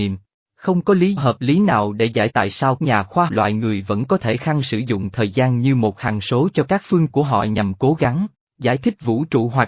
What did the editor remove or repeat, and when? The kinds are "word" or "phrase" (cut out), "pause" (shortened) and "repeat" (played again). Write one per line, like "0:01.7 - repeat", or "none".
0:01.2 - word
0:02.3 - word
0:02.8 - word
0:03.3 - word
0:04.4 - word
0:07.1 - word